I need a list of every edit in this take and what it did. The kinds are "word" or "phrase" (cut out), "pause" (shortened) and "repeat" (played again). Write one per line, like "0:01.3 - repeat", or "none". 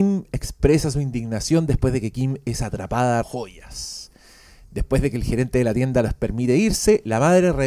0:03.2 - word

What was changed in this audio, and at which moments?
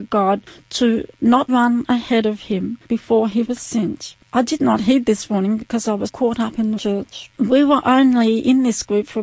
0:01.5 - word
0:02.8 - pause
0:04.2 - pause
0:06.1 - word
0:06.8 - word
0:07.3 - pause

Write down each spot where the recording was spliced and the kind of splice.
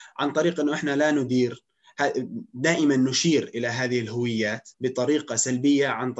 0:04.7 - pause

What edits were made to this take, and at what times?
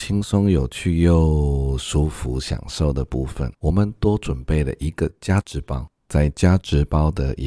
0:03.6 - pause
0:06.0 - pause

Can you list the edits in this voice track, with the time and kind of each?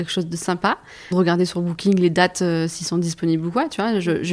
0:01.1 - word

